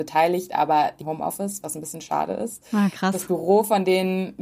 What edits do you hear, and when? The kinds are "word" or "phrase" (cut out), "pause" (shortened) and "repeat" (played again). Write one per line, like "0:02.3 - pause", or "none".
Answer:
0:01.0 - phrase